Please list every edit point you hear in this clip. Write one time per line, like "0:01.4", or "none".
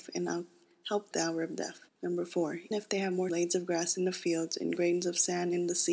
0:01.1
0:01.9
0:02.7
0:03.3